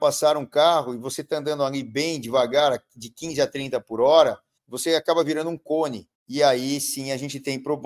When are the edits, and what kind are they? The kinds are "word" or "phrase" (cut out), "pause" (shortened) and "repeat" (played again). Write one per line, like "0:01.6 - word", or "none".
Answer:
0:04.6 - pause
0:06.1 - pause